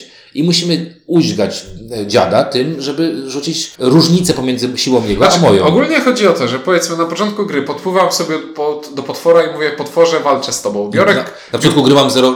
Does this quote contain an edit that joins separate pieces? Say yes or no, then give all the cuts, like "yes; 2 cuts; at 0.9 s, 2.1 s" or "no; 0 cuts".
yes; 1 cut; at 3.7 s